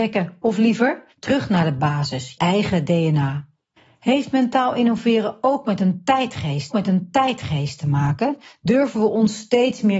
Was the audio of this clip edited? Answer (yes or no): yes